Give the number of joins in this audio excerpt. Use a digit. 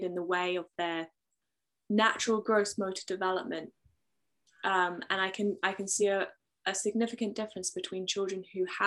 0